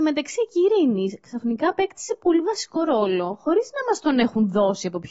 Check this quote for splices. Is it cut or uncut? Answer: uncut